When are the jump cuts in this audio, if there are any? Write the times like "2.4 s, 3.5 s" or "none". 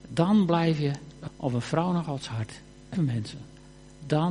1.3 s, 2.9 s